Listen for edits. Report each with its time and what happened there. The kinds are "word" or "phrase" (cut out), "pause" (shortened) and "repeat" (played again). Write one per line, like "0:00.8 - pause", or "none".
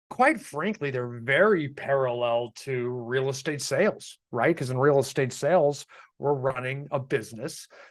none